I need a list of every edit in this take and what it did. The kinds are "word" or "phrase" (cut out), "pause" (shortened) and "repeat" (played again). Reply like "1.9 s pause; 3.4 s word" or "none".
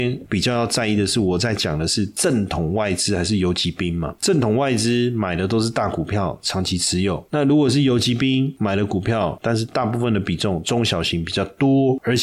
9.4 s phrase